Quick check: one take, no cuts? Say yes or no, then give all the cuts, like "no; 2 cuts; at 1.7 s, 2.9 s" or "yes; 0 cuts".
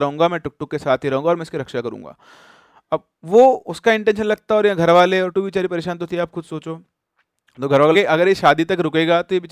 no; 2 cuts; at 5.3 s, 7.9 s